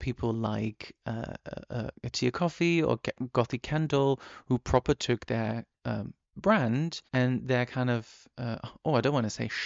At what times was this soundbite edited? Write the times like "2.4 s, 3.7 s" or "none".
7.1 s